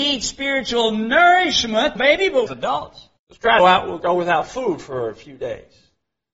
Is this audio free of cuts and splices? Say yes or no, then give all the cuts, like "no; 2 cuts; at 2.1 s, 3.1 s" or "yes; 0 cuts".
no; 5 cuts; at 2.0 s, 2.5 s, 3.2 s, 3.6 s, 4.0 s